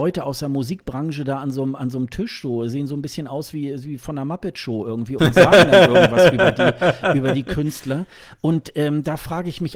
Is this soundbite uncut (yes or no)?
no